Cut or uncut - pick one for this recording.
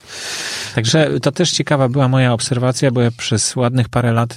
uncut